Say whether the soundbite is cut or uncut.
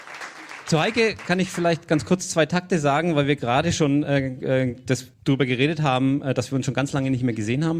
cut